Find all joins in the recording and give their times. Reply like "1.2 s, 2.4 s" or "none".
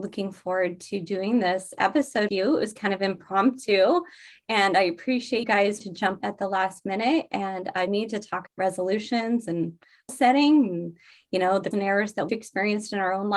2.3 s, 5.4 s, 5.8 s, 6.2 s, 7.9 s, 8.5 s, 10.1 s, 11.7 s, 12.3 s